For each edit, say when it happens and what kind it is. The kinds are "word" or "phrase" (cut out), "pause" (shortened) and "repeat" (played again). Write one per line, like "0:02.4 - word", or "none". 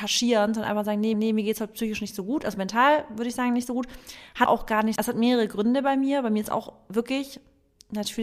0:01.1 - repeat
0:04.5 - word
0:05.0 - word